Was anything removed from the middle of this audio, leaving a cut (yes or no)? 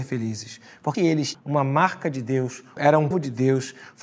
yes